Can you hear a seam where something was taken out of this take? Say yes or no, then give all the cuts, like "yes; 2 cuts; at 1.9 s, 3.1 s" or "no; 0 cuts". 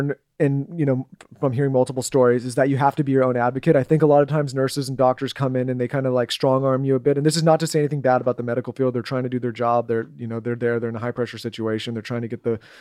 no; 0 cuts